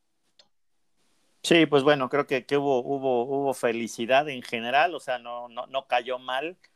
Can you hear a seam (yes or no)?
no